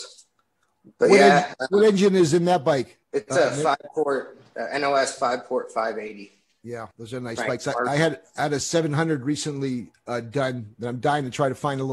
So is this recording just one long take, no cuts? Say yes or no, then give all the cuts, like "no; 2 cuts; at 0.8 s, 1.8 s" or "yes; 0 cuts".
no; 2 cuts; at 3.0 s, 6.9 s